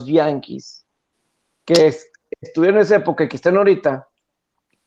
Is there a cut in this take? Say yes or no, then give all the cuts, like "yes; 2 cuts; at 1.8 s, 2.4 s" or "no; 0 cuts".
no; 0 cuts